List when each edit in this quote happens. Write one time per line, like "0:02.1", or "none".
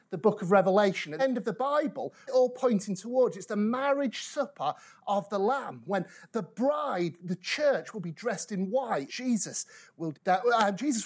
0:01.2
0:02.3
0:07.2
0:09.1
0:10.1